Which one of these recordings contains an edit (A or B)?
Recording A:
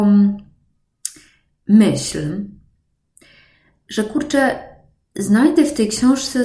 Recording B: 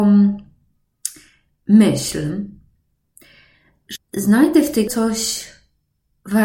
B